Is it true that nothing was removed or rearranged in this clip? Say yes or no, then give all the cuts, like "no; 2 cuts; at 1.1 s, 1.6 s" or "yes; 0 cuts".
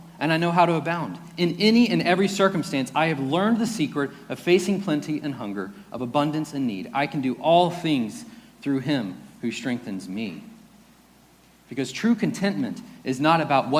yes; 0 cuts